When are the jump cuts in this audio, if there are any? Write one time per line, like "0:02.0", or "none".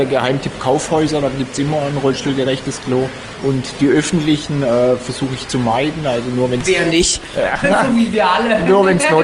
none